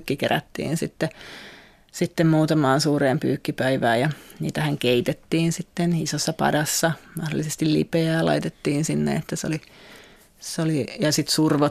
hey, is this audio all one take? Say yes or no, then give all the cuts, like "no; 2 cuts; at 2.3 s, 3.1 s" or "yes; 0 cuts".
yes; 0 cuts